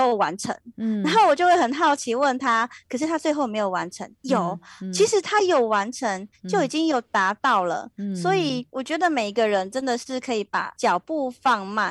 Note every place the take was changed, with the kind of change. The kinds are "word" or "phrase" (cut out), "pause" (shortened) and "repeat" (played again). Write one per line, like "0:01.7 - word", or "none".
none